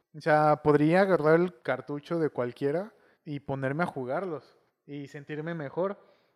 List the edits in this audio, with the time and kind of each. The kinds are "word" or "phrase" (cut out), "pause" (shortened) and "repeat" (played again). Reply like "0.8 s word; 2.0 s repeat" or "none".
1.6 s pause; 3.1 s pause; 4.7 s pause